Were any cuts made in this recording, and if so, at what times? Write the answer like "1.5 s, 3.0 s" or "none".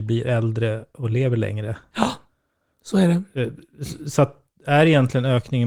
none